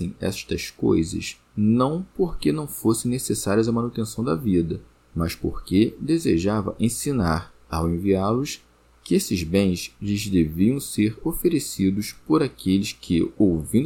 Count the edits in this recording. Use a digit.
2